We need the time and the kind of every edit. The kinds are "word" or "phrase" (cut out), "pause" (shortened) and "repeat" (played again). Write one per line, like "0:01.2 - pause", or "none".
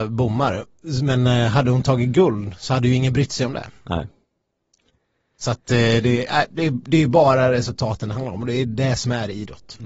none